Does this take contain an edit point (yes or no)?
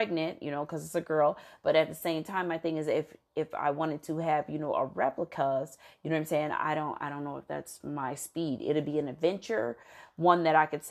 no